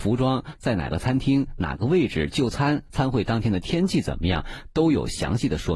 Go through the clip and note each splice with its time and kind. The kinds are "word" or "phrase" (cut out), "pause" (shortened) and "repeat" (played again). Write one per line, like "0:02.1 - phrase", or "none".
0:02.9 - word